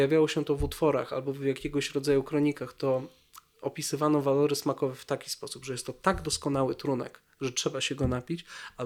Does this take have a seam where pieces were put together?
no; 0 cuts

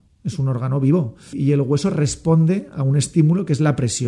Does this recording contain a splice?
yes; 1 cut; at 1.3 s

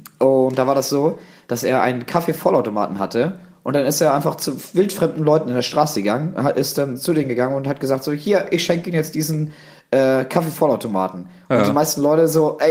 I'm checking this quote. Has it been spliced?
no; 0 cuts

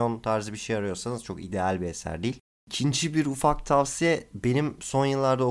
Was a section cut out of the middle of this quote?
no; 0 cuts

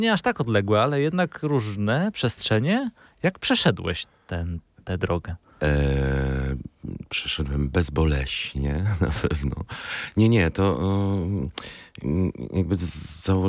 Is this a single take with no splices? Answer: yes; 0 cuts

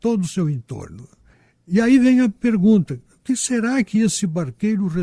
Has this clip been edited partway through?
no; 0 cuts

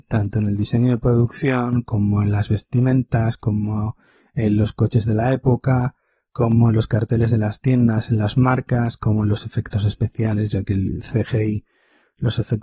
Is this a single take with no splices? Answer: yes; 0 cuts

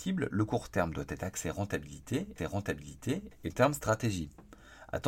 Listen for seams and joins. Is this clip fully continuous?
no; 2 cuts; at 2.4 s, 3.5 s

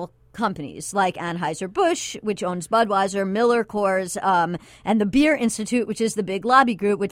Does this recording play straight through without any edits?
yes; 0 cuts

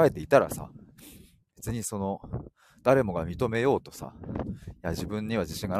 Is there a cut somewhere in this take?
no; 0 cuts

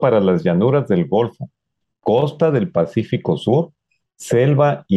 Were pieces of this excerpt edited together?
no; 0 cuts

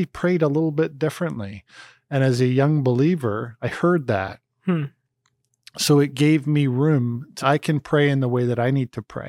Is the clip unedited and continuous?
no; 1 cut; at 7.4 s

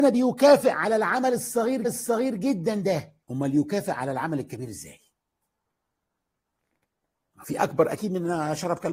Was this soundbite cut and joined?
yes; 3 cuts; at 1.8 s, 3.2 s, 7.6 s

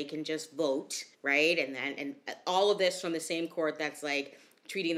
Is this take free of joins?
no; 1 cut; at 1.1 s

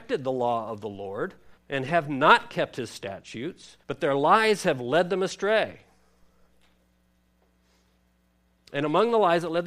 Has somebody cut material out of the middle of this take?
yes; 2 cuts; at 1.6 s, 3.8 s

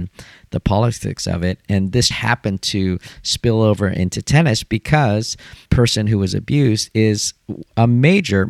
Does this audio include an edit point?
yes; 2 cuts; at 2.1 s, 5.7 s

